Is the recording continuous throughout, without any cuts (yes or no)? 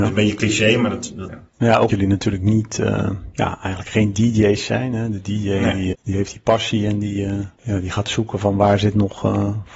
no